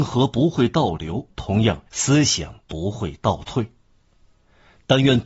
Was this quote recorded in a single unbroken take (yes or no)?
no